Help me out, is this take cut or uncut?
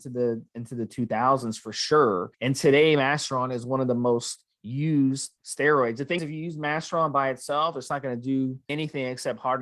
cut